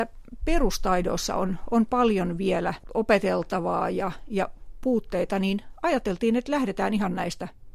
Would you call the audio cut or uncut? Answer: uncut